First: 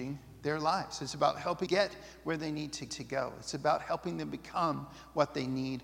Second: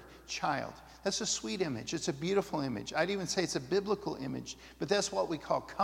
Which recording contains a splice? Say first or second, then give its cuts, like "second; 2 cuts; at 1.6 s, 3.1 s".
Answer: first; 2 cuts; at 1.7 s, 2.9 s